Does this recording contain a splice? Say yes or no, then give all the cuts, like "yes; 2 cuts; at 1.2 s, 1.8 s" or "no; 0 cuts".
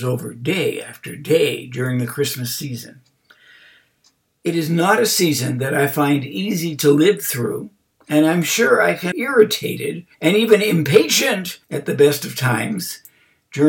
yes; 3 cuts; at 9.1 s, 10.1 s, 11.6 s